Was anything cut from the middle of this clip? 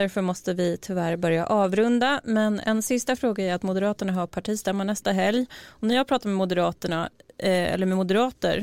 no; 0 cuts

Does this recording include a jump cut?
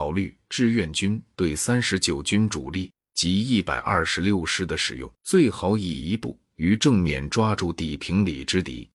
yes; 1 cut; at 5.2 s

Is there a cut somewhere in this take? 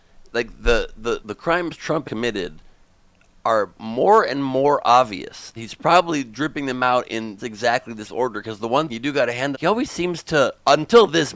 yes; 6 cuts; at 1.2 s, 2.0 s, 5.6 s, 7.4 s, 8.9 s, 9.5 s

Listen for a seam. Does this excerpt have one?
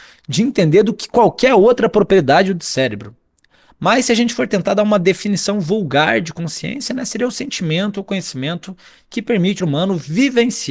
yes; 1 cut; at 9.6 s

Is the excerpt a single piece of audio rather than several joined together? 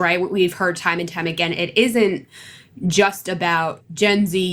yes; 0 cuts

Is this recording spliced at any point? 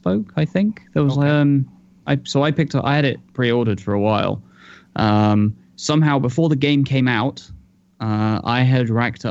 no; 0 cuts

